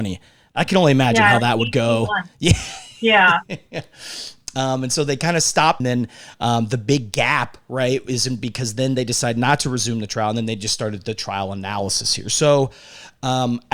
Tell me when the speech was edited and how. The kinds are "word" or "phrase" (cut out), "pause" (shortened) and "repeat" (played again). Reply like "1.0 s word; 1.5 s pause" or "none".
5.8 s phrase

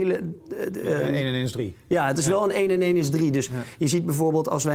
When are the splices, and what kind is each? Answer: none

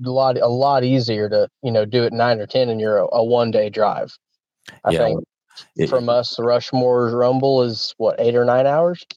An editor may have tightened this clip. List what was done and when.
none

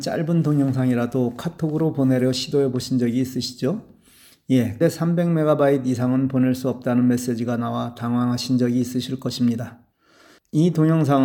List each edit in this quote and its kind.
4.8 s word

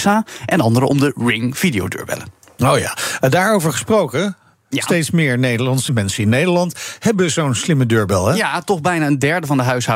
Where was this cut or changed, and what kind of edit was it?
5.9 s word

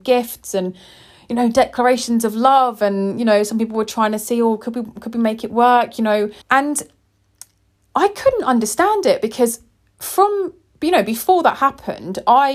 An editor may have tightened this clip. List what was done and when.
6.4 s pause

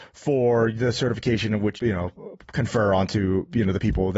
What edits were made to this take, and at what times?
1.8 s word

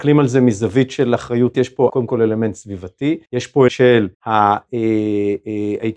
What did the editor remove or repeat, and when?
1.5 s word; 1.9 s word; 3.2 s pause; 3.7 s word; 4.1 s pause

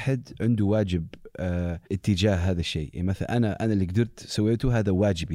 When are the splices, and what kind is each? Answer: 1.9 s pause

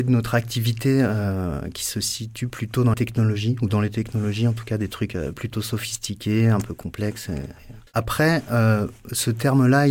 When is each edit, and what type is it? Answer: 2.9 s phrase; 7.9 s pause

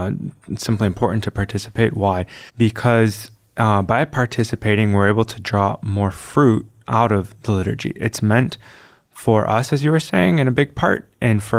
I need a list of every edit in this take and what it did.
2.5 s pause

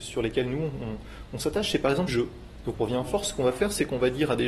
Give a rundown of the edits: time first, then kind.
2.1 s phrase; 2.7 s phrase

